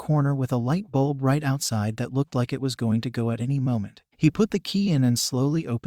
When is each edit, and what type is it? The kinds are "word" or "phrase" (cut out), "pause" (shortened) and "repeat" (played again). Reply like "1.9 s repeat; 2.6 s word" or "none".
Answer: 4.1 s pause